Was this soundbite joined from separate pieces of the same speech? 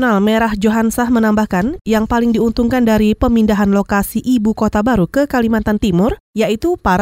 no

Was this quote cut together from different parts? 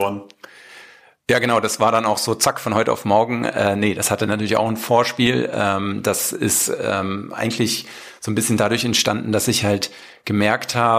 no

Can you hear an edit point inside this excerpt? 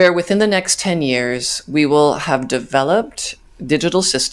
no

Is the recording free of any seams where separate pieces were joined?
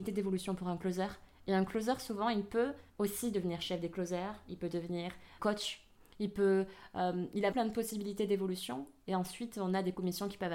no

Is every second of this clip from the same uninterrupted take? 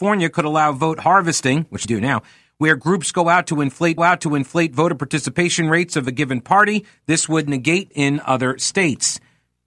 no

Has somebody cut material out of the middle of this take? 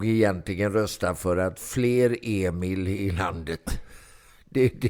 no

